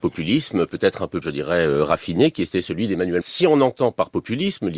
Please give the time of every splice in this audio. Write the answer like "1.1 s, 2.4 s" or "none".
1.2 s, 3.2 s